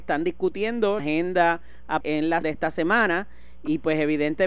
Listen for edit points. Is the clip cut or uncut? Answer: cut